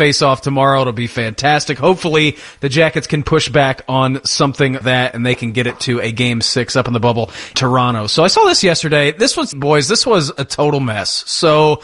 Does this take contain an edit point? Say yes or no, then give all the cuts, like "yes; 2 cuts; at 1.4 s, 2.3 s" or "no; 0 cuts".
yes; 3 cuts; at 4.8 s, 7.5 s, 9.5 s